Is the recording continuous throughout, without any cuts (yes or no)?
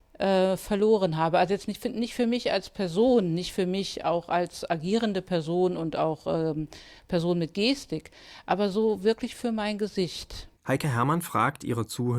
no